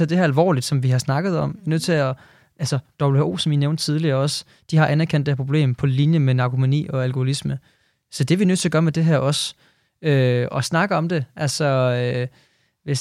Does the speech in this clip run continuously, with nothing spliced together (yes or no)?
yes